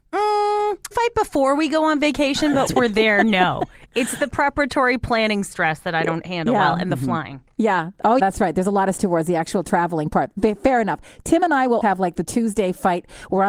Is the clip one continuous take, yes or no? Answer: no